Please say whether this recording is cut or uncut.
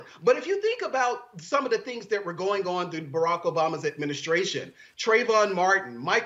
uncut